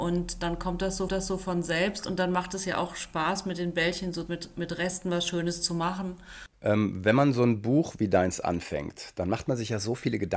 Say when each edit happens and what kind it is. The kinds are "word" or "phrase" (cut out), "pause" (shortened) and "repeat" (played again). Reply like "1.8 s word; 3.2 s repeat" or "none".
1.1 s repeat; 4.3 s phrase